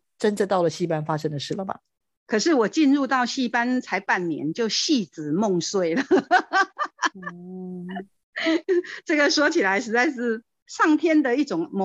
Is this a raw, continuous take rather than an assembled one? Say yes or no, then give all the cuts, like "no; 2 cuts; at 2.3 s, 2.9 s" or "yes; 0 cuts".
yes; 0 cuts